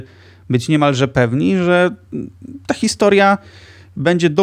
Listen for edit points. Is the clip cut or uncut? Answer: uncut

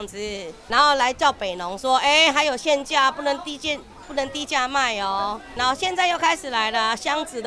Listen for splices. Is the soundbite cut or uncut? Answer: uncut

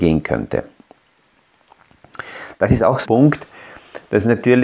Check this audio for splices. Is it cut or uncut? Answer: cut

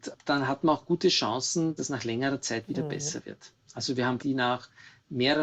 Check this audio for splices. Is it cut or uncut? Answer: cut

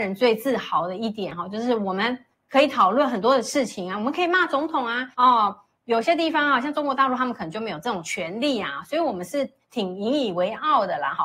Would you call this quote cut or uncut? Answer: cut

